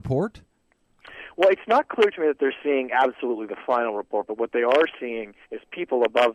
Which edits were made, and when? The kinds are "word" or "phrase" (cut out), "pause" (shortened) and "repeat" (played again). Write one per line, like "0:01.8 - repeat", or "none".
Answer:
0:05.4 - pause